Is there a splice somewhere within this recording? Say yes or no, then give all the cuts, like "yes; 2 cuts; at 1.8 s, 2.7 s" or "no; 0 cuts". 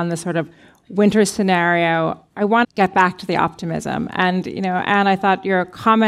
yes; 1 cut; at 2.6 s